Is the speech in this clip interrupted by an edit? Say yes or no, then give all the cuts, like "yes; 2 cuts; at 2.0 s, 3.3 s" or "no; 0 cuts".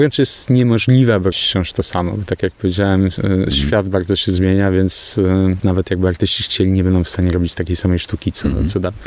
yes; 1 cut; at 1.3 s